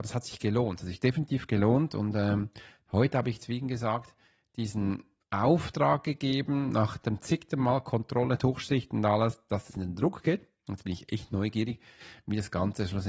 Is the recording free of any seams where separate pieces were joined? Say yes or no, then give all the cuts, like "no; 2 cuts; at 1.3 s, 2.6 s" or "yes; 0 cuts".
no; 1 cut; at 9.7 s